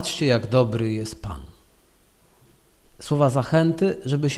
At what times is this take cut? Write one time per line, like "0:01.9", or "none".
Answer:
none